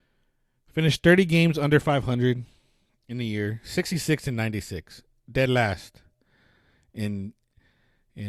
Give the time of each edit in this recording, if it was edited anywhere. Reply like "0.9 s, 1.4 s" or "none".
none